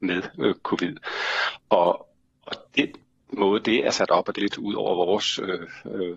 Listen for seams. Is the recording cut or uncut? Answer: cut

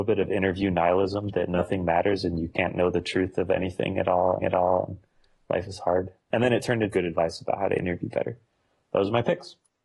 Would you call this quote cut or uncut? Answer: cut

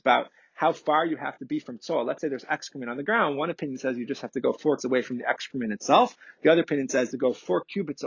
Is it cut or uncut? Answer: cut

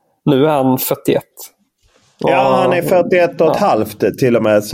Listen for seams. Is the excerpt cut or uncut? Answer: uncut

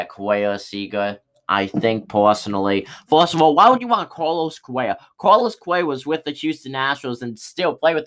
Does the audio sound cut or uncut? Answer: uncut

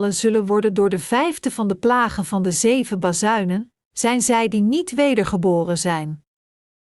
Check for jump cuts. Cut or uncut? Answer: uncut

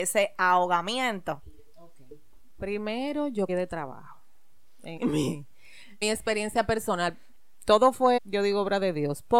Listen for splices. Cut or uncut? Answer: cut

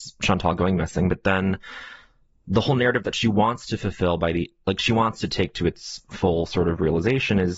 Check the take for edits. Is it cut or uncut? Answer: uncut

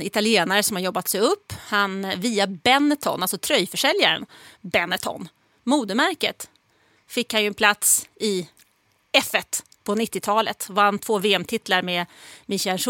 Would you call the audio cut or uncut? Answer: uncut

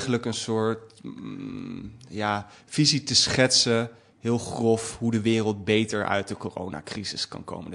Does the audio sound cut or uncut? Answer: uncut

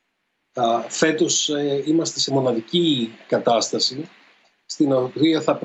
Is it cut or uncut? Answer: cut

